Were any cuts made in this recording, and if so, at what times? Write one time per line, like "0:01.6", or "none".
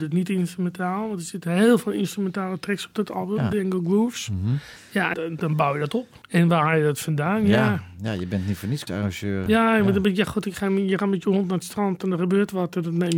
0:05.1
0:08.9
0:09.5